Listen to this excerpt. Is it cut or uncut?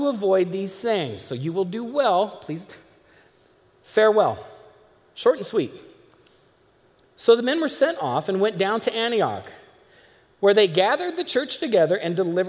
uncut